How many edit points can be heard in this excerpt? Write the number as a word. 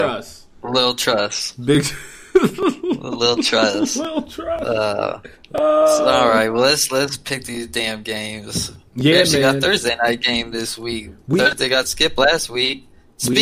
one